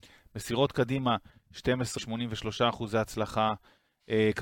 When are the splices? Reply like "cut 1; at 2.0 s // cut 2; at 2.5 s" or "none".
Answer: cut 1; at 2.0 s